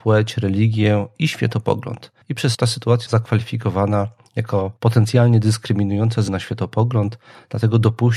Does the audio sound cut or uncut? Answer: cut